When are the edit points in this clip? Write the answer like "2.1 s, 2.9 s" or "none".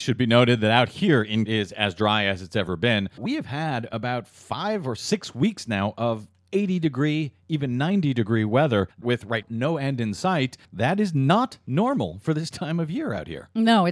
1.5 s, 3.2 s, 8.9 s, 9.4 s, 10.6 s